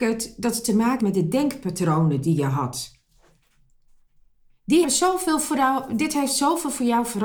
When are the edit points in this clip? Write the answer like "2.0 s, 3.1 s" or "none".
1.0 s, 4.8 s